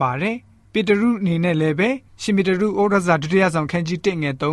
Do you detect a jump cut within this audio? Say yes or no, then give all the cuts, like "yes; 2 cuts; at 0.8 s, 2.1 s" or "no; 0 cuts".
no; 0 cuts